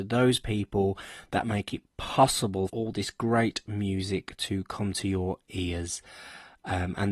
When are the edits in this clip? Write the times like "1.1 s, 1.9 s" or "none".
2.7 s